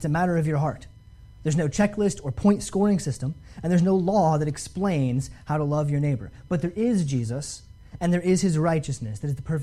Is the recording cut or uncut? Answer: uncut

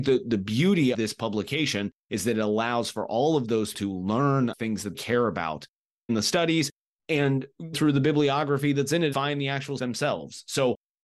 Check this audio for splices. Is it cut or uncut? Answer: cut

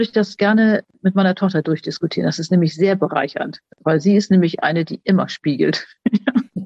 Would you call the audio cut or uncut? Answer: uncut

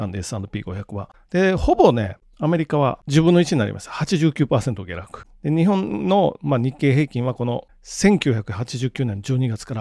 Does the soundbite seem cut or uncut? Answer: cut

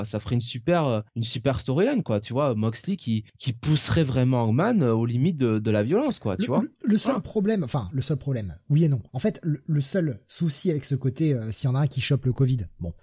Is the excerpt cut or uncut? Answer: cut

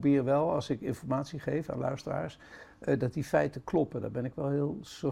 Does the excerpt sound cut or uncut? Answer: uncut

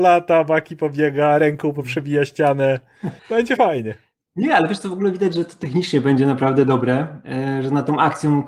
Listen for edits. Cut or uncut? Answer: cut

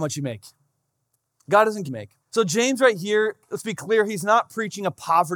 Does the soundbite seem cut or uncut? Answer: cut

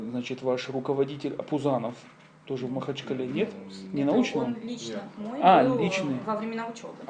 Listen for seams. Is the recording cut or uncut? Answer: uncut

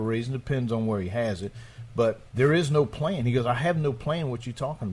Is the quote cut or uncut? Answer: cut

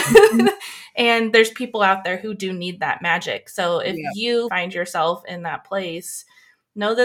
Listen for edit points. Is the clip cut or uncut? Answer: cut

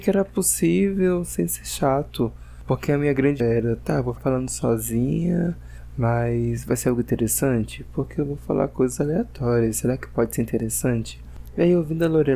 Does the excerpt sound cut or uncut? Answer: cut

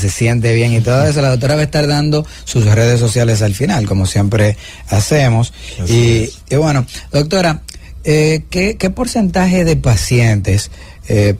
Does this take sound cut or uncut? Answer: uncut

